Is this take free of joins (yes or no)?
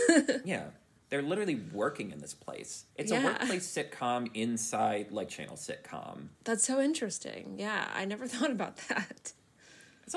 no